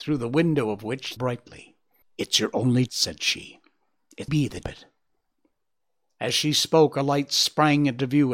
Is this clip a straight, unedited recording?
no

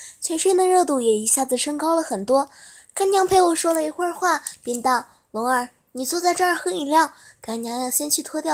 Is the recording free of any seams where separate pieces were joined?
yes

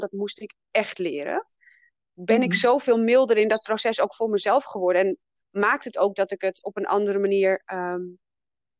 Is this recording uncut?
yes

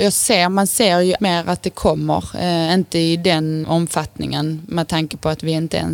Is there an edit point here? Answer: yes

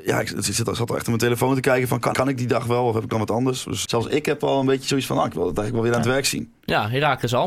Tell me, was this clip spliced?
yes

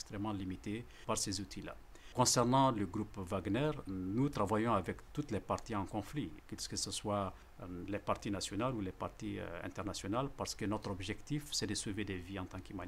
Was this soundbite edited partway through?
yes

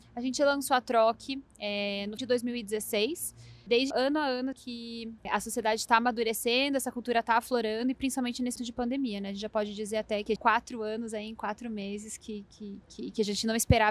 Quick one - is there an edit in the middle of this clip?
yes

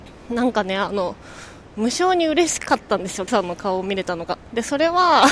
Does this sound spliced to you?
yes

